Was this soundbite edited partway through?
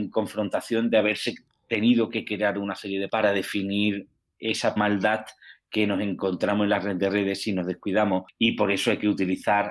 yes; 2 cuts; at 3.1 s, 4.8 s

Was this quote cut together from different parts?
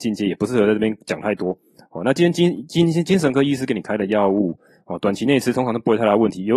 no; 0 cuts

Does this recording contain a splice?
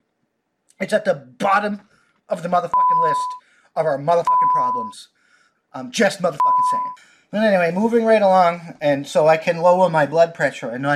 no; 0 cuts

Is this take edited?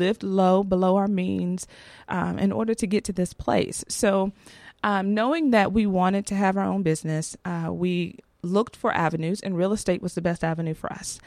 no; 0 cuts

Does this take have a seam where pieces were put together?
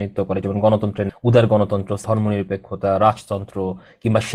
yes; 2 cuts; at 1.1 s, 2.0 s

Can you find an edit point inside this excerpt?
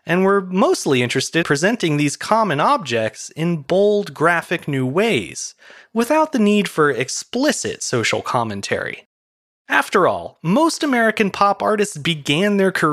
yes; 1 cut; at 1.4 s

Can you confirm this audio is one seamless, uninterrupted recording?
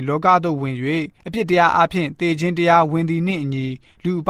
no; 1 cut; at 1.2 s

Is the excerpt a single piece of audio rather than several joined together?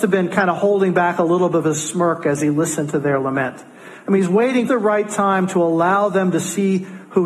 no; 1 cut; at 4.7 s

